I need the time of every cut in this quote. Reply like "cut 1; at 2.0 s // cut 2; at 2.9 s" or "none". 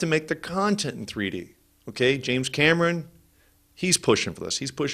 none